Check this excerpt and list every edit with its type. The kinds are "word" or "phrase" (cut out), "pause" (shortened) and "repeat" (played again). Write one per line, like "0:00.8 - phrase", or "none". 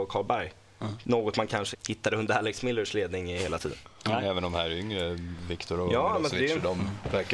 0:01.7 - word